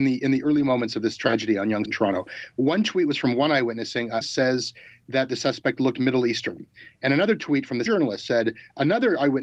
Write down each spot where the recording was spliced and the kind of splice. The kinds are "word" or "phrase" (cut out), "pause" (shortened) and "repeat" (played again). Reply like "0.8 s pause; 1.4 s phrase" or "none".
1.8 s word; 4.2 s phrase; 7.9 s word